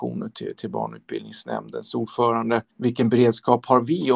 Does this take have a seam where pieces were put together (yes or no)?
yes